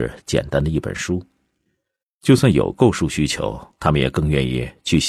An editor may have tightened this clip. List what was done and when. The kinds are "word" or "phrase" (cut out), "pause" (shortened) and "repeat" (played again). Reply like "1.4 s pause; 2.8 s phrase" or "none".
3.7 s pause